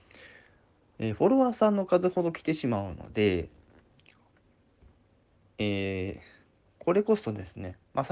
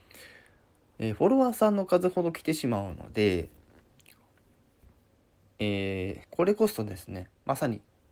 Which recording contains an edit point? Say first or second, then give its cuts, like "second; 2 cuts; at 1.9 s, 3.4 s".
second; 1 cut; at 6.2 s